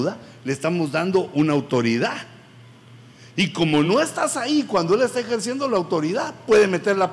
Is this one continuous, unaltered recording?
yes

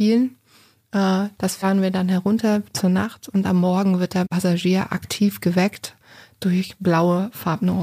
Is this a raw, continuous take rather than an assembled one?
yes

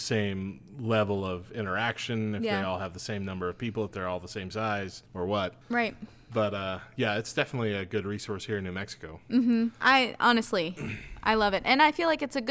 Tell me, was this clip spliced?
yes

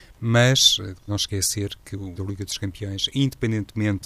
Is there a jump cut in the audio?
yes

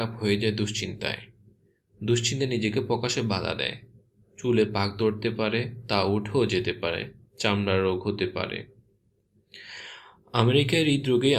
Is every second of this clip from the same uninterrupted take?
yes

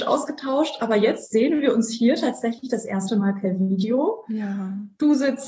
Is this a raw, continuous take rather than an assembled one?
yes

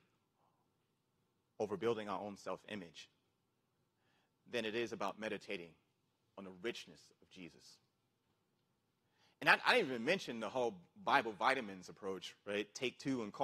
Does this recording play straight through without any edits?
yes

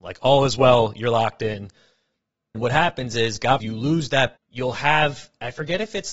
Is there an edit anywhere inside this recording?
yes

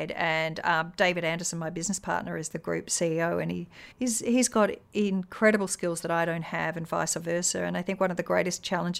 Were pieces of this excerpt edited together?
yes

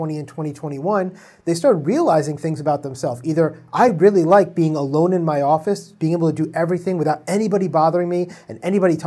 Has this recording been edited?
no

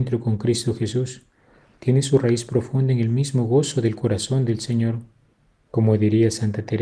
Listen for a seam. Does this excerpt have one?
no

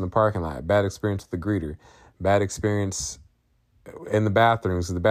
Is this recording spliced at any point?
no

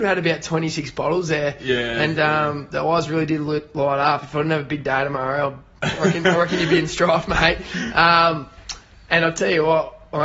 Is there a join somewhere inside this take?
no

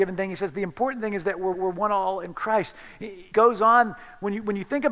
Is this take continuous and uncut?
no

